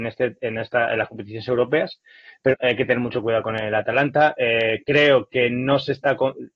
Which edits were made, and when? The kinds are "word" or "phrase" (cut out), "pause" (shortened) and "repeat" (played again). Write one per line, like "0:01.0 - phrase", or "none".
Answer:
0:02.5 - word